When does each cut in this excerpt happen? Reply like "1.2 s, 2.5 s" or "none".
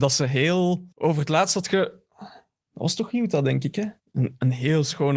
0.9 s, 4.0 s